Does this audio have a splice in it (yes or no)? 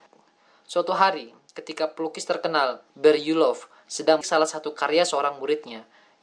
yes